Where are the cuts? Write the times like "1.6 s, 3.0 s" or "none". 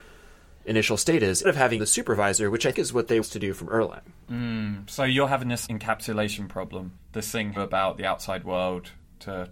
1.4 s, 1.8 s, 2.7 s, 3.2 s, 4.2 s, 5.7 s, 7.0 s, 7.6 s